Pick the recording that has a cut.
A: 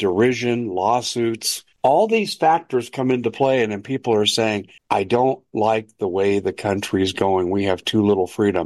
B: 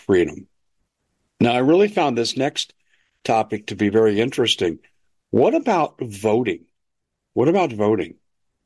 A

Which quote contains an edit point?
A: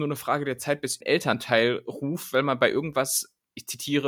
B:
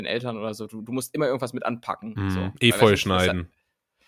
A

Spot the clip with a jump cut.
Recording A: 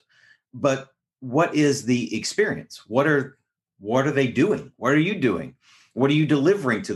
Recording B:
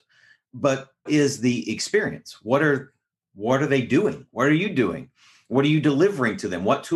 B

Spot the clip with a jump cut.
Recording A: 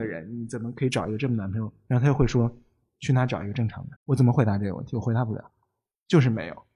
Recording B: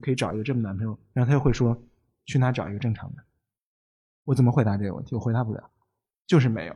A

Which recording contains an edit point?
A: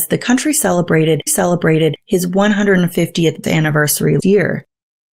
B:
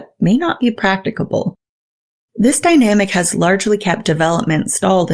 A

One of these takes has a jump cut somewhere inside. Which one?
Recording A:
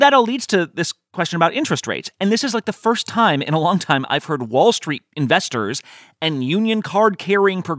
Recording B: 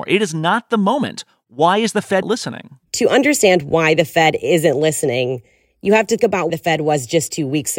B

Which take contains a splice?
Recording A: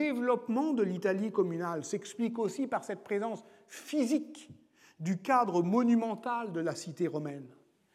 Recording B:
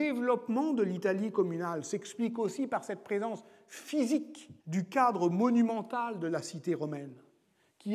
B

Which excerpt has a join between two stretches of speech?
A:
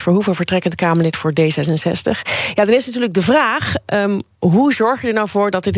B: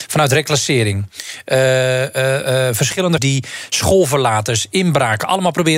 B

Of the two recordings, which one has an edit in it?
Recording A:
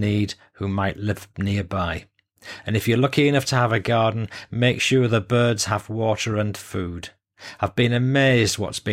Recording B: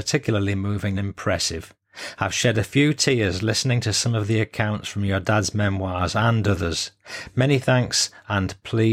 B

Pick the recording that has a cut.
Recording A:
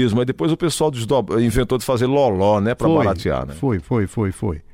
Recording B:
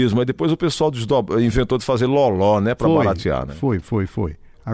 B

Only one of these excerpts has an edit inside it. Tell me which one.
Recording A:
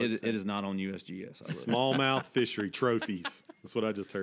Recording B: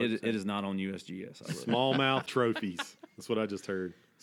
B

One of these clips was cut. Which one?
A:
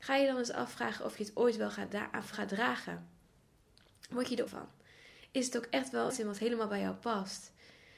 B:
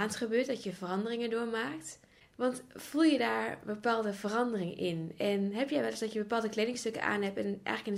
A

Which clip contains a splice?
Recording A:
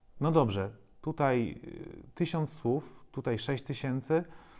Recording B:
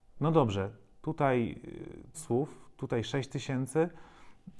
B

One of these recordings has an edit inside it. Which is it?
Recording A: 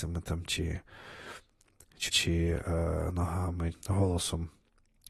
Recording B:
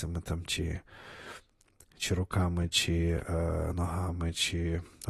A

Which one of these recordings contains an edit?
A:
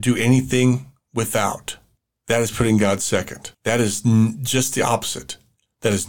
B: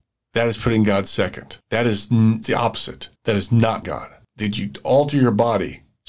B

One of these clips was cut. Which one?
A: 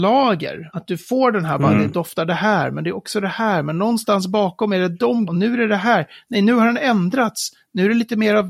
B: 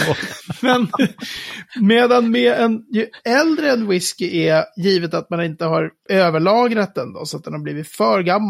A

